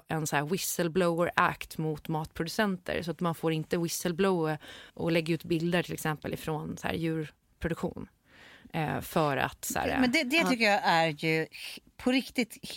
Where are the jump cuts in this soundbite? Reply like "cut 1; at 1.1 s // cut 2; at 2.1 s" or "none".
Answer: cut 1; at 4.9 s